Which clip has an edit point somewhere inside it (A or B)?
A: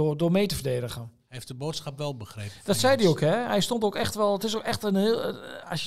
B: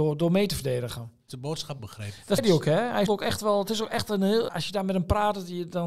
B